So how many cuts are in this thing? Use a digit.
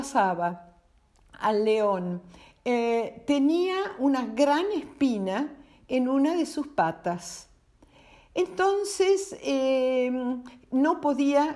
0